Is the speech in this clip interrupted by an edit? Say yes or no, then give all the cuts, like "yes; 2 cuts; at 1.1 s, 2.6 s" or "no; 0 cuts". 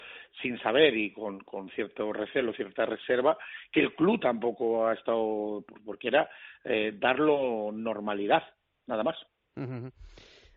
no; 0 cuts